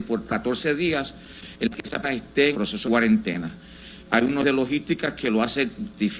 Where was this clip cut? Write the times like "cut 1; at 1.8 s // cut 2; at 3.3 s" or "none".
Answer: cut 1; at 1.7 s // cut 2; at 2.0 s // cut 3; at 2.5 s // cut 4; at 2.8 s // cut 5; at 4.4 s